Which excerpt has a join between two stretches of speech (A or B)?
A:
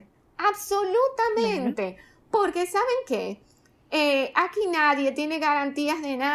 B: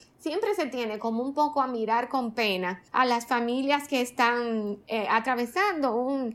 B